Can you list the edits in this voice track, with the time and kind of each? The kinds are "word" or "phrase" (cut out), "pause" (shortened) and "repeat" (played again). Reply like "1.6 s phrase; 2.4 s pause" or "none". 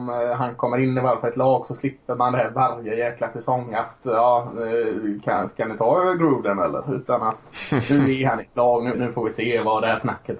8.9 s word